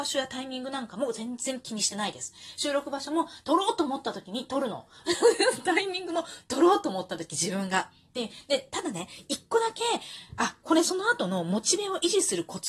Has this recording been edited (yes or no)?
no